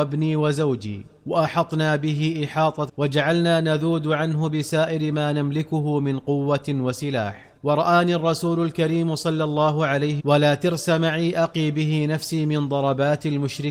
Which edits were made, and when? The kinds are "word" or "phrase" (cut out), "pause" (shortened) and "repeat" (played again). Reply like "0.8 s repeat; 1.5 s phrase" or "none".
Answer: 1.2 s pause; 2.9 s phrase; 7.6 s pause; 10.2 s word